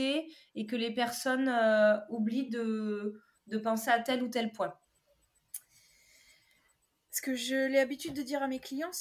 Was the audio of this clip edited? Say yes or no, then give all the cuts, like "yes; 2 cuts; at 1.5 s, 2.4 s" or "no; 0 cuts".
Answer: no; 0 cuts